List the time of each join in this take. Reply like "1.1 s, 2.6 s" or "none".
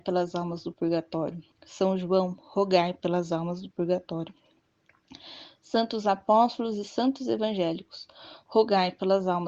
1.5 s

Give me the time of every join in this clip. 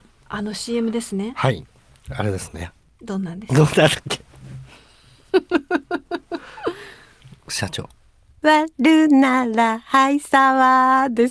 none

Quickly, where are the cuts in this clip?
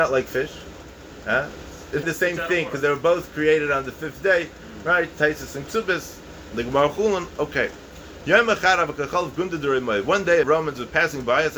2.0 s, 10.4 s

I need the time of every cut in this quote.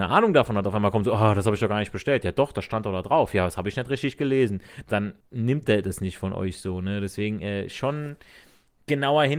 5.2 s

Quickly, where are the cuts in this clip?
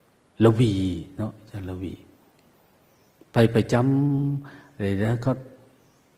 2.3 s

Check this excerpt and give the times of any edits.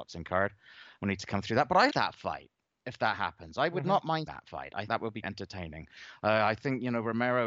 1.9 s, 4.3 s, 4.9 s, 5.2 s

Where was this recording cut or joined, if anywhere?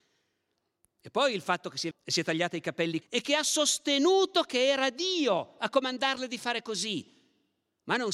1.9 s, 3.0 s

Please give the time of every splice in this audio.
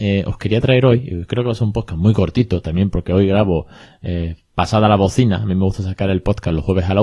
none

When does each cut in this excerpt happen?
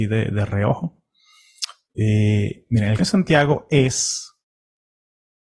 3.0 s

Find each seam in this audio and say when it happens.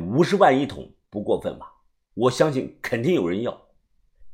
none

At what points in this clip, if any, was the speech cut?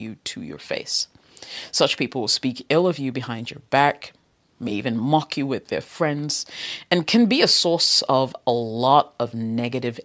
none

